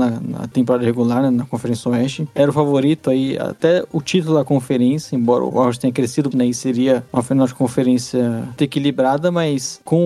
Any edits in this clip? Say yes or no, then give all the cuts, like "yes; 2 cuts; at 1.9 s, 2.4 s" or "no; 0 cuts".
yes; 2 cuts; at 6.3 s, 8.6 s